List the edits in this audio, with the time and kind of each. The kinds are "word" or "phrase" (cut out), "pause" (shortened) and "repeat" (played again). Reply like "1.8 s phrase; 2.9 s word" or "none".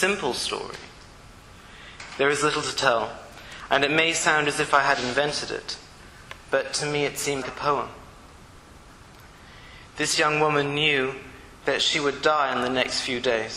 7.4 s word

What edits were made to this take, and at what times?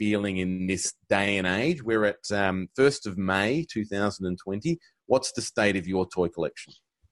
none

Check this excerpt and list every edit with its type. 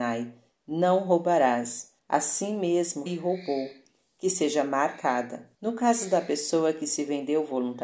2.0 s pause; 3.1 s word; 5.5 s pause

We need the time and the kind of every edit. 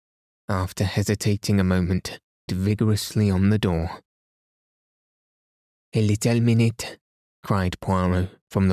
2.5 s word

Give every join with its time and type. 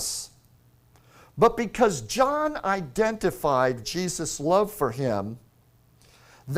3.8 s word

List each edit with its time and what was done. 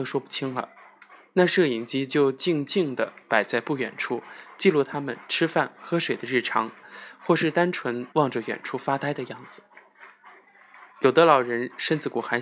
8.1 s pause; 10.9 s pause

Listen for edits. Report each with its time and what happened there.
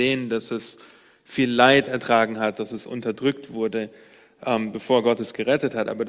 none

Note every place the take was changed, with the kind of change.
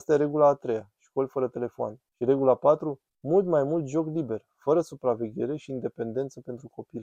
2.1 s pause; 3.1 s pause

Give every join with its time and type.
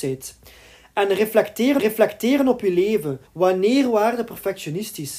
1.8 s repeat; 3.3 s pause

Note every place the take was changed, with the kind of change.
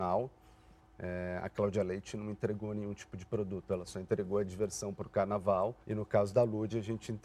5.8 s pause

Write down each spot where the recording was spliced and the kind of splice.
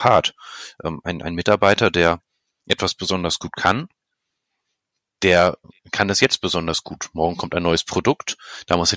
none

